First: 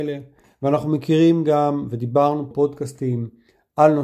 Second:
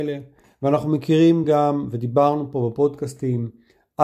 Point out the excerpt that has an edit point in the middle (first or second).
first